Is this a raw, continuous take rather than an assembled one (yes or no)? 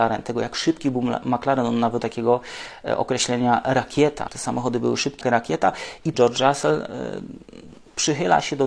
no